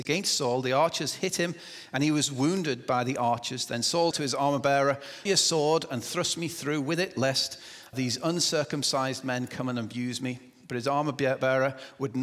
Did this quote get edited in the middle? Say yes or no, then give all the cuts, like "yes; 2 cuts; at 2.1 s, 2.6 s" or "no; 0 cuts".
yes; 3 cuts; at 4.1 s, 5.3 s, 7.9 s